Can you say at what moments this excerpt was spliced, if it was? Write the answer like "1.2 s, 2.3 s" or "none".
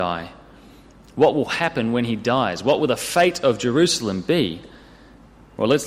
none